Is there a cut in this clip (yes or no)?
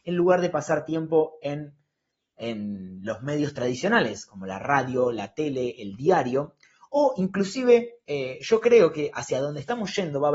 no